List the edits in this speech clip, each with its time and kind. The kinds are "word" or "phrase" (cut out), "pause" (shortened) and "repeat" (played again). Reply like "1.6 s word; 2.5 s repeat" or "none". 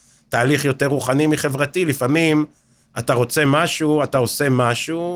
none